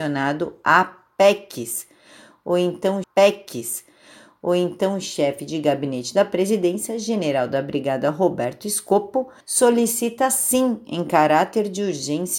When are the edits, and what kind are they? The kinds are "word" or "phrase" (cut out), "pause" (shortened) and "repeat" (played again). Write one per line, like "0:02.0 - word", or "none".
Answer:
0:03.0 - repeat
0:09.4 - pause